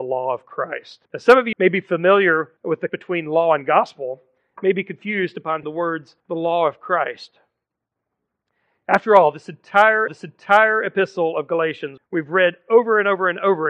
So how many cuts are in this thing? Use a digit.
8